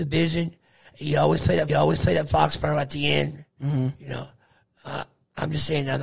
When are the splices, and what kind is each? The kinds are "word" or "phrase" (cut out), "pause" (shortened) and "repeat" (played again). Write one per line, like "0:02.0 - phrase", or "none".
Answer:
0:01.7 - repeat